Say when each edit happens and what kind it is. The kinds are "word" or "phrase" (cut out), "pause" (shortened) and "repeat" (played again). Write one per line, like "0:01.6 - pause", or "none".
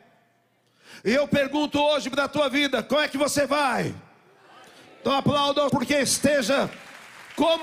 0:05.7 - word